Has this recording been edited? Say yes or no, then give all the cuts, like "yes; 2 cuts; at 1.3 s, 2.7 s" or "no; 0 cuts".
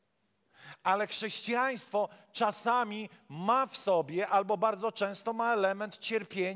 no; 0 cuts